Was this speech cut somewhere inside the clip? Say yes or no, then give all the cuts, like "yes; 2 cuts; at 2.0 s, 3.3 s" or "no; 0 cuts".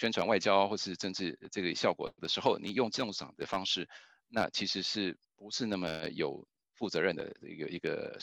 yes; 1 cut; at 5.2 s